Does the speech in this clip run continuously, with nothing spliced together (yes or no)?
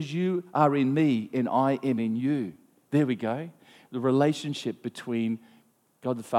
yes